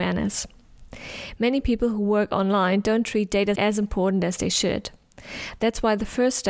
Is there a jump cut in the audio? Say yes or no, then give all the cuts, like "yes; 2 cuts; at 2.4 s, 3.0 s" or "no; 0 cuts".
yes; 1 cut; at 3.6 s